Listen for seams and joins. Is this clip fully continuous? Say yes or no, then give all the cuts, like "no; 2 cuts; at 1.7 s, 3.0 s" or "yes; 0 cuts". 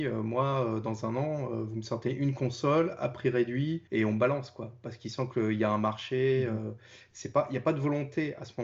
no; 1 cut; at 3.9 s